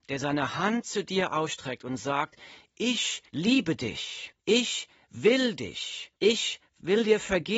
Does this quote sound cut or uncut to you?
cut